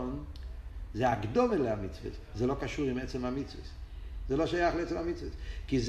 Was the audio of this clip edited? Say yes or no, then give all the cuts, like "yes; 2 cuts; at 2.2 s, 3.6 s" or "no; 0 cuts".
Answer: no; 0 cuts